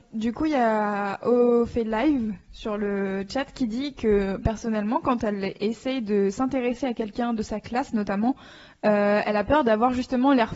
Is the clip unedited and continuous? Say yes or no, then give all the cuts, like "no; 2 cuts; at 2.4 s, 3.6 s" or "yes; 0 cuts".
yes; 0 cuts